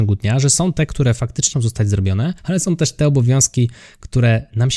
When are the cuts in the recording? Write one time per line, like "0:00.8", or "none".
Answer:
0:01.5
0:02.4